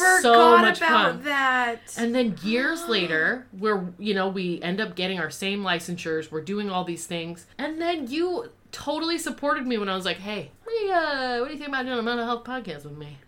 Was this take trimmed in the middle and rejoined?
yes; 2 cuts; at 7.5 s, 10.6 s

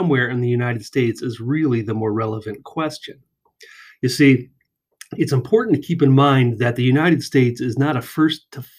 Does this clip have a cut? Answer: no; 0 cuts

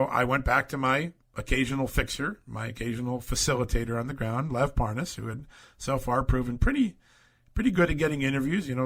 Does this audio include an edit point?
no; 0 cuts

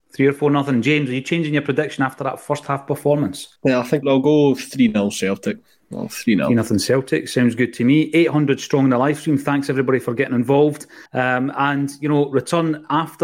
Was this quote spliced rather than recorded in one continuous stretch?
yes; 3 cuts; at 3.6 s, 4.0 s, 11.1 s

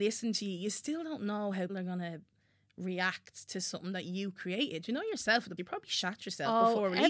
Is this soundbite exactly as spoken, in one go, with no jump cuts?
no; 2 cuts; at 1.7 s, 5.6 s

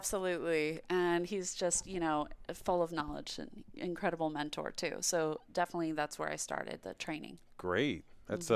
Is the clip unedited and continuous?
yes; 0 cuts

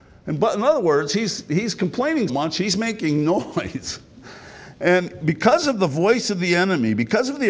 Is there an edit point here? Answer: yes; 1 cut; at 2.3 s

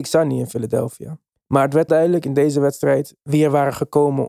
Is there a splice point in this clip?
yes; 2 cuts; at 1.3 s, 1.9 s

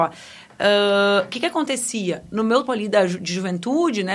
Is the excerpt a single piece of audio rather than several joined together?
no; 1 cut; at 2.7 s

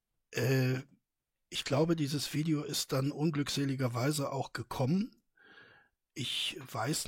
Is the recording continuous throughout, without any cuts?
yes; 0 cuts

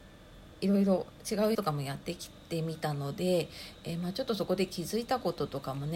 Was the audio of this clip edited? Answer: yes; 1 cut; at 1.5 s

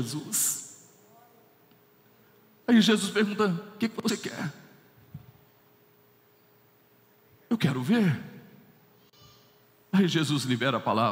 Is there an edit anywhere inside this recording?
no; 0 cuts

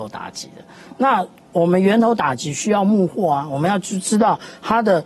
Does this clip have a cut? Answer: no; 0 cuts

